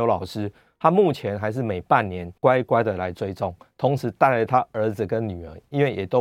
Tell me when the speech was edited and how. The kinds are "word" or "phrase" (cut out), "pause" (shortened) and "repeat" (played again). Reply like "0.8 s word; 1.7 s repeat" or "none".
2.4 s pause